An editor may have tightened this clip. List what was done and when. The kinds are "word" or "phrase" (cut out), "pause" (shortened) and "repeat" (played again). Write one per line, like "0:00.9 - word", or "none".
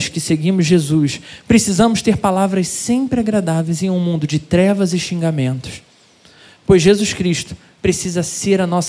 none